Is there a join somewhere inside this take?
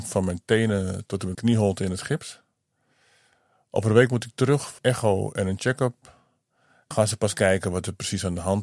yes; 3 cuts; at 1.3 s, 4.8 s, 6.9 s

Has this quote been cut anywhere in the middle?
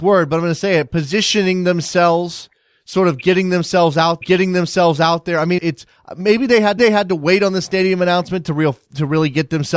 yes; 3 cuts; at 4.2 s, 5.6 s, 6.8 s

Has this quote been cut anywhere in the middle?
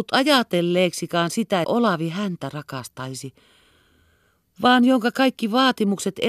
yes; 1 cut; at 1.6 s

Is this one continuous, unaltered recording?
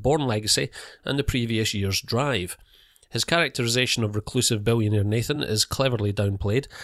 yes; 0 cuts

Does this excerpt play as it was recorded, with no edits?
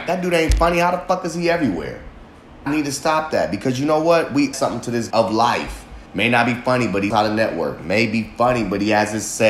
no; 5 cuts; at 2.7 s, 4.5 s, 5.1 s, 6.1 s, 7.1 s

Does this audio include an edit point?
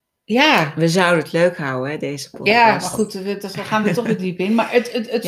no; 0 cuts

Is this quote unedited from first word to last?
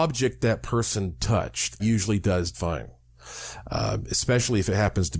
no; 2 cuts; at 1.8 s, 2.5 s

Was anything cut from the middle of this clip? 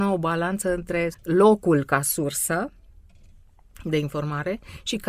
yes; 1 cut; at 1.1 s

